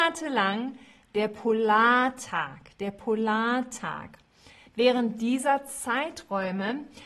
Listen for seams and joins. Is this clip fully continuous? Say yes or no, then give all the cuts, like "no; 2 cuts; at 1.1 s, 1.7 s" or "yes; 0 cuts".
yes; 0 cuts